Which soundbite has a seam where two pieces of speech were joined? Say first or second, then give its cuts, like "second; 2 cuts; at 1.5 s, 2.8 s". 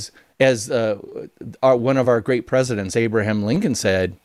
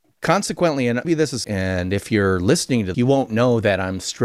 second; 3 cuts; at 1.0 s, 1.4 s, 2.9 s